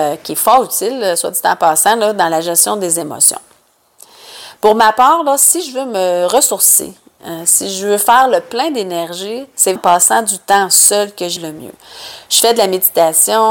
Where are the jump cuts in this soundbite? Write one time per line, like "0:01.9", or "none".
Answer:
0:09.8
0:11.4